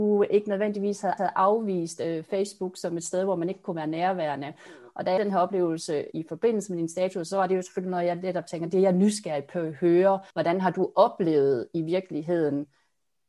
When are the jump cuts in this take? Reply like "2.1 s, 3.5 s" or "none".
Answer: 1.2 s, 5.2 s, 6.1 s, 10.3 s